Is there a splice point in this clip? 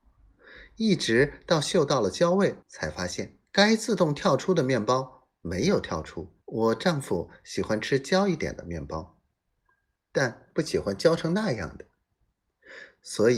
yes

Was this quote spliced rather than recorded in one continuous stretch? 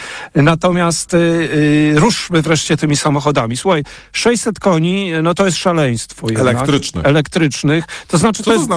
no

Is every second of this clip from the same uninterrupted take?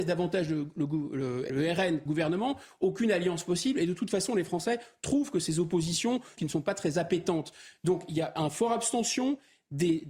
no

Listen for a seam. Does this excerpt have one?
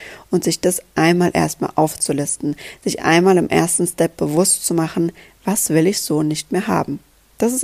no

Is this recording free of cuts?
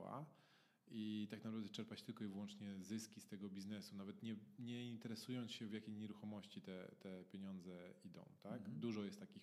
yes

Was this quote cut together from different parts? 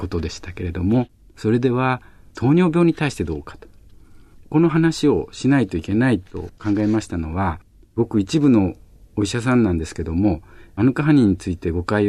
no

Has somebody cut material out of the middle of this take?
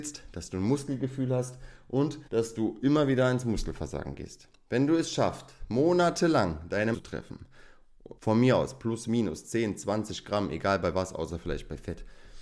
yes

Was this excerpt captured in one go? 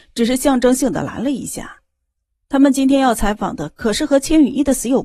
yes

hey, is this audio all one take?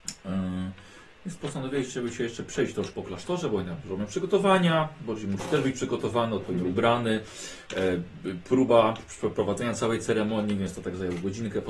no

